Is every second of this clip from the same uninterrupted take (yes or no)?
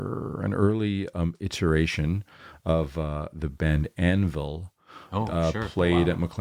yes